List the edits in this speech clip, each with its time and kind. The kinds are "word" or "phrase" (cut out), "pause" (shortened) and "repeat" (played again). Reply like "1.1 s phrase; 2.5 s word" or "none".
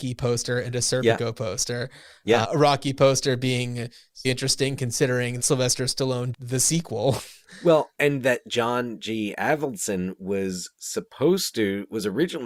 2.4 s word; 4.2 s word; 5.4 s word; 6.3 s word